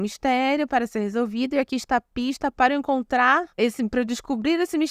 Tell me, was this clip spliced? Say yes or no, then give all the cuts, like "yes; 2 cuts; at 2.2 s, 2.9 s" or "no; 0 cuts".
yes; 1 cut; at 3.5 s